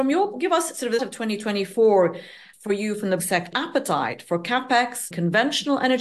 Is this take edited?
yes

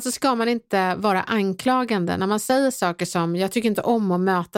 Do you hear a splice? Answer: no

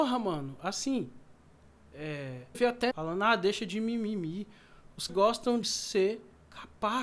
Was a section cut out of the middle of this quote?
yes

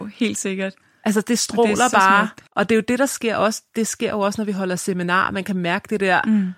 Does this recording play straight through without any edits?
no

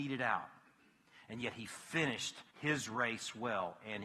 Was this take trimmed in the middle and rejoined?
yes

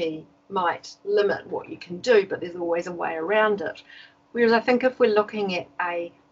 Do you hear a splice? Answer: no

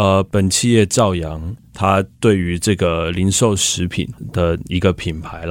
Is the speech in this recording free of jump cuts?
no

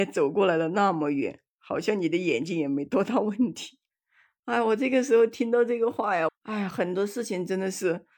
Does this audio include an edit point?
yes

